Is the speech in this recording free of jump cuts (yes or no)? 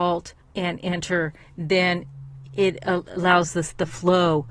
yes